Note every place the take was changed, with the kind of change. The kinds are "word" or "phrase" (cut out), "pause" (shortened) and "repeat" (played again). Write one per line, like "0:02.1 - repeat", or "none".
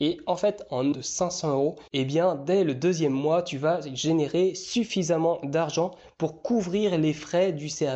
0:00.9 - phrase